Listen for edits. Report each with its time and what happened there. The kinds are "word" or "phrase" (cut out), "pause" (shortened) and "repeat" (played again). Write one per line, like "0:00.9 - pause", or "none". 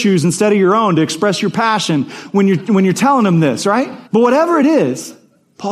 0:04.1 - pause

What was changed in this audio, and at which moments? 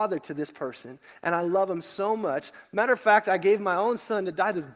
none

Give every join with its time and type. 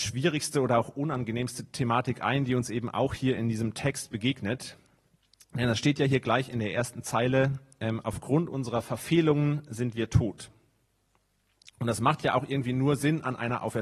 none

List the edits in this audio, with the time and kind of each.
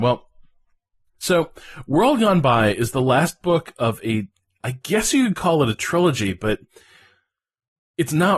none

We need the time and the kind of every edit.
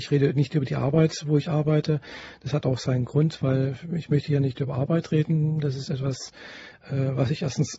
none

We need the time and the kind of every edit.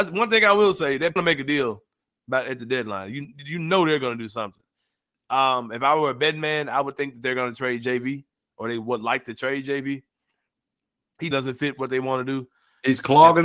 0:01.2 - phrase
0:11.3 - word

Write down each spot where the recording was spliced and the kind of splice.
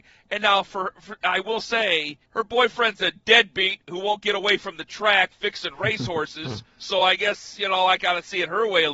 0:02.2 - pause

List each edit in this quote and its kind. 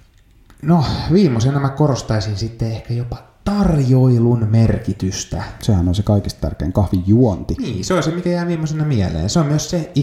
none

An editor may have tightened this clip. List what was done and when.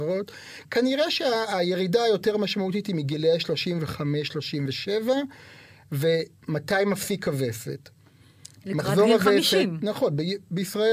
none

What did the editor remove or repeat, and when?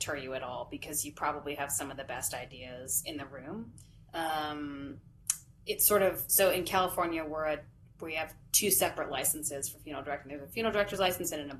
0:04.1 - pause

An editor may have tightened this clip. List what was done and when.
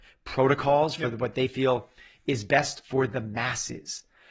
none

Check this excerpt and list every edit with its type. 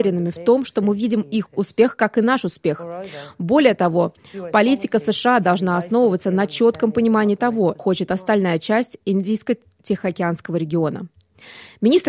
0:01.5 - word
0:07.8 - word

